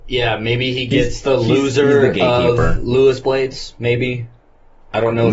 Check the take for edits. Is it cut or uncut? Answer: uncut